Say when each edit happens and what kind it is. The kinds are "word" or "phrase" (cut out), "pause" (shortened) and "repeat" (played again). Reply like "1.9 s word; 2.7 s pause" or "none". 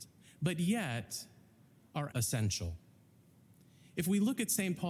2.1 s word